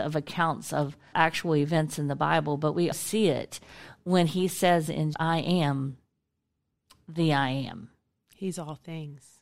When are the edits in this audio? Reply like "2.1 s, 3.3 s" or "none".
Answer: 1.1 s, 2.9 s, 5.1 s